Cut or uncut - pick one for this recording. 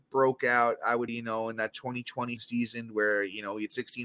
cut